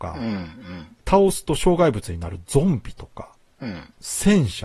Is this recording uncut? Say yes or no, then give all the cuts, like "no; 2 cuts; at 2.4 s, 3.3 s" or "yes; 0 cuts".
yes; 0 cuts